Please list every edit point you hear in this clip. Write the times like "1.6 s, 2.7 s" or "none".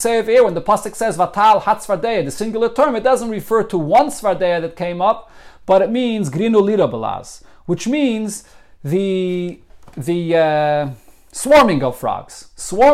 none